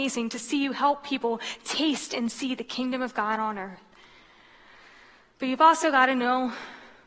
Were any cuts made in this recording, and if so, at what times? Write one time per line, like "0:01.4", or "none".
none